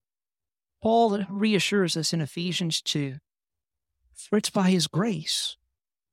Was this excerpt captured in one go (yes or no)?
yes